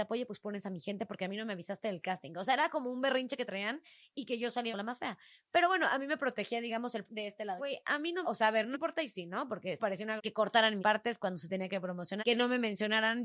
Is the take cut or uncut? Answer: cut